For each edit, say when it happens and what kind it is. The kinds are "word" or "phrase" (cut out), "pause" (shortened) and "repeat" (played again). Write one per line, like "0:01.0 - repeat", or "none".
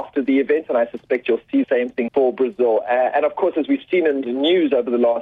0:01.6 - word
0:02.1 - word
0:04.2 - word